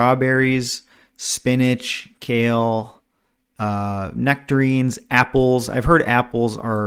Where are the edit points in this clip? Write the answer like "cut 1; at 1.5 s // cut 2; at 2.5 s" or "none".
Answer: none